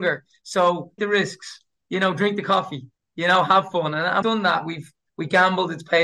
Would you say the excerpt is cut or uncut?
cut